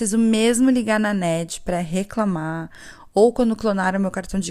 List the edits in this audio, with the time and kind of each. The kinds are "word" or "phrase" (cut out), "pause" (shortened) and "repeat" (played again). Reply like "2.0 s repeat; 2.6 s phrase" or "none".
none